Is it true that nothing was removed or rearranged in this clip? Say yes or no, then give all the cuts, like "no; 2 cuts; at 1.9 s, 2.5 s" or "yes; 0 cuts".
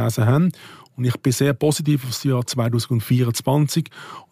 yes; 0 cuts